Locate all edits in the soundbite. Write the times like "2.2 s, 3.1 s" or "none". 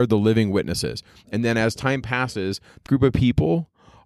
2.9 s